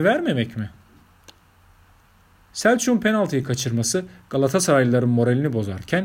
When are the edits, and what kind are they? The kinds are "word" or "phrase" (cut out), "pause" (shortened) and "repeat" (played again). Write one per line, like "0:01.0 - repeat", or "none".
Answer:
none